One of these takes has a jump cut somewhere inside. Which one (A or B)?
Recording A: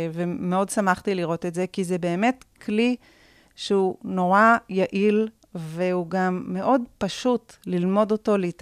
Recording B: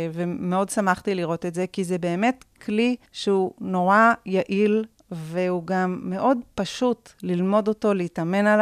B